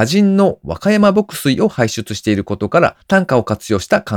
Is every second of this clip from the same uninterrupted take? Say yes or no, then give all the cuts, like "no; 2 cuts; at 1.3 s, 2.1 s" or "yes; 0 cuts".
no; 1 cut; at 3.0 s